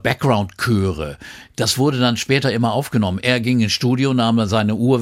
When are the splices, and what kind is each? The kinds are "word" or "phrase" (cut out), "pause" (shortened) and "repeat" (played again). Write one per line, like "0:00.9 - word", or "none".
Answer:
none